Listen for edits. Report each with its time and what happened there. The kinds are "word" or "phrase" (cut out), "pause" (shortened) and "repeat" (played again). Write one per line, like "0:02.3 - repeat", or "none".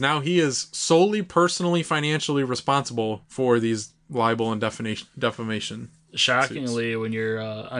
0:03.2 - pause